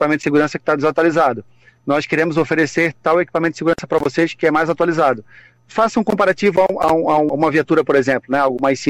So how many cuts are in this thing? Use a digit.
1